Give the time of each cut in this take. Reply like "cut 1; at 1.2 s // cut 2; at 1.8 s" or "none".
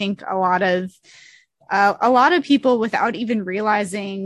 none

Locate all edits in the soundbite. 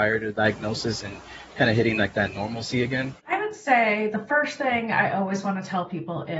cut 1; at 3.2 s

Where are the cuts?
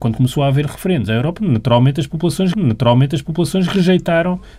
cut 1; at 2.5 s

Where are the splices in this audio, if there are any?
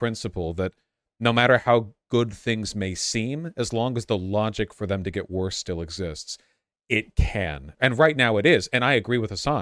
cut 1; at 7.8 s

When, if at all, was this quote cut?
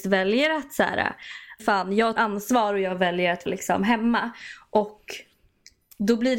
cut 1; at 1.6 s // cut 2; at 2.2 s // cut 3; at 3.5 s

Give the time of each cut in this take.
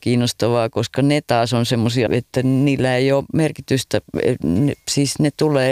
cut 1; at 2.1 s

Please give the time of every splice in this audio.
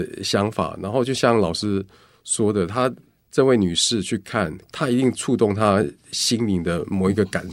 none

